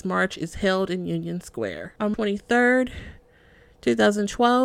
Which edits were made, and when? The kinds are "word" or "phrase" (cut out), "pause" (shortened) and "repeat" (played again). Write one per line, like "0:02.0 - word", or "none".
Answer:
0:02.1 - word